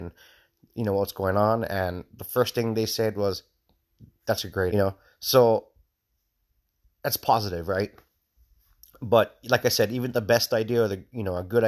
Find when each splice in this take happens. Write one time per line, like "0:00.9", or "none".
0:04.7